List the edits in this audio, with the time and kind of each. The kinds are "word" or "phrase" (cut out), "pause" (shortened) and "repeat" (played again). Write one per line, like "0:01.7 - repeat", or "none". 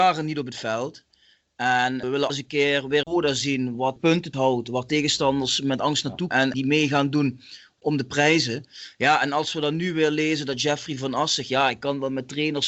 0:02.3 - word
0:03.0 - word
0:04.3 - word
0:06.3 - word